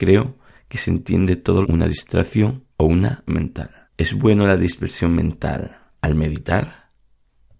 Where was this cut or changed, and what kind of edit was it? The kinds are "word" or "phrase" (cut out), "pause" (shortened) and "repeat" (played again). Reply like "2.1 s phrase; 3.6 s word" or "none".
1.6 s phrase; 2.7 s pause; 3.3 s word; 3.8 s pause

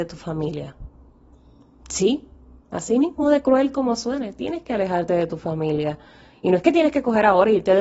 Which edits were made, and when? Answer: none

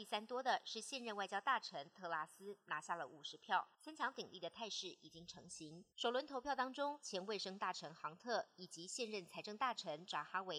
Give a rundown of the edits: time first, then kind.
3.7 s pause; 5.9 s pause

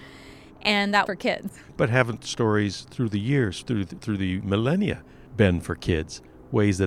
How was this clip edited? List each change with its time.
1.1 s word; 5.3 s pause

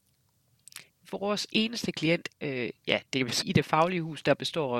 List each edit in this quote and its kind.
2.3 s word; 3.4 s word

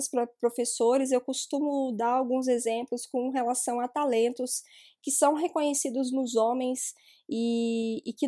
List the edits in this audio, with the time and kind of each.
none

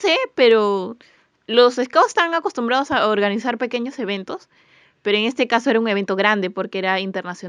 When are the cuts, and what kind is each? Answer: none

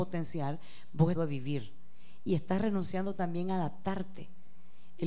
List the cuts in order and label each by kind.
1.1 s phrase

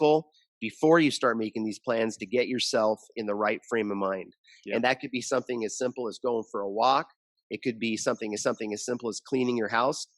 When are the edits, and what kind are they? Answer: 8.4 s repeat

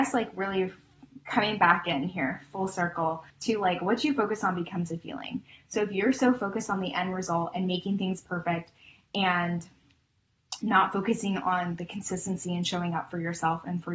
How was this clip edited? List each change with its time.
3.3 s pause

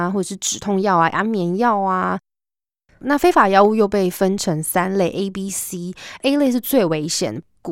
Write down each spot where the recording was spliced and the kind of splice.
none

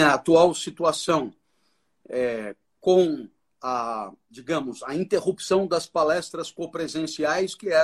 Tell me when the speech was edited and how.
none

